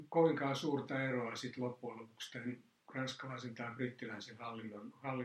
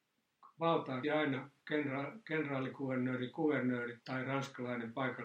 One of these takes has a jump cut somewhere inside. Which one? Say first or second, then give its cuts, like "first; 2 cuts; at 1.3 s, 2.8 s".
second; 3 cuts; at 1.0 s, 1.6 s, 4.0 s